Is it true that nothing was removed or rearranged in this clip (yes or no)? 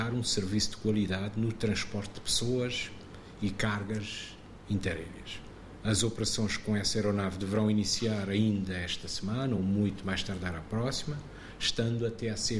yes